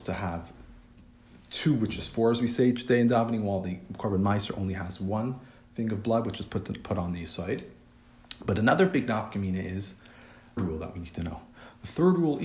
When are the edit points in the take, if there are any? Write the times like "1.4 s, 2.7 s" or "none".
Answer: 10.6 s